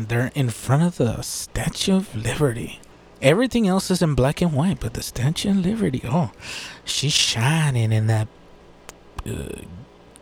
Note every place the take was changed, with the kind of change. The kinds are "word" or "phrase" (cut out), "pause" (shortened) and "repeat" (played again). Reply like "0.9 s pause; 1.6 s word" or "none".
2.9 s pause